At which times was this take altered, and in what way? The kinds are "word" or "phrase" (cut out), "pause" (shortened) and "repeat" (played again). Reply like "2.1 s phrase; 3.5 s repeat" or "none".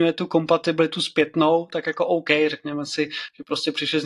none